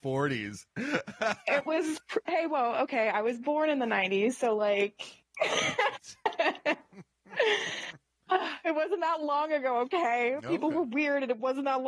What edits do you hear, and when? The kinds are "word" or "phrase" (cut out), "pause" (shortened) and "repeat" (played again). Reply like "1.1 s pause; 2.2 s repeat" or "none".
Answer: none